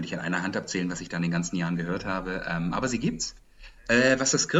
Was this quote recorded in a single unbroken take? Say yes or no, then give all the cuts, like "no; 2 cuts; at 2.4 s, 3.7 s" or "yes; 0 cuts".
yes; 0 cuts